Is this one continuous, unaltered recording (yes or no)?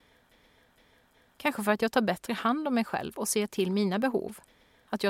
yes